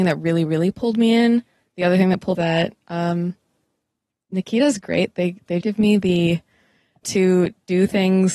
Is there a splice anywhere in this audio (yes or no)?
yes